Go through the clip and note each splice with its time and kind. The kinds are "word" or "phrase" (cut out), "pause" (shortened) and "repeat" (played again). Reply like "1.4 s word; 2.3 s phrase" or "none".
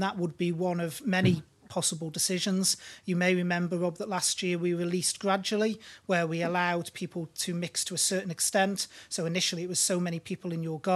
none